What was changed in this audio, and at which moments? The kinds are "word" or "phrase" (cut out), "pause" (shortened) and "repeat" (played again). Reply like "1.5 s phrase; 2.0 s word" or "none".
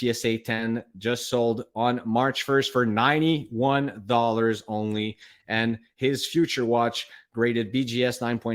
none